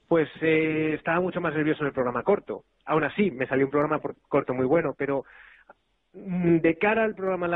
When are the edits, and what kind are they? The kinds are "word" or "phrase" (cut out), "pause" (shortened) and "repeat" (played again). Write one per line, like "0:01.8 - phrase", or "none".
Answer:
none